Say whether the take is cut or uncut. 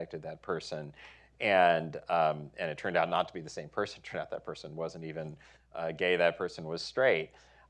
uncut